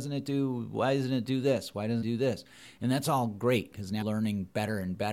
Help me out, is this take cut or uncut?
cut